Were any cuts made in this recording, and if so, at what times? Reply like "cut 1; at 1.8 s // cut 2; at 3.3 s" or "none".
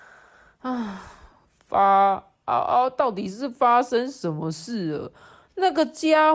none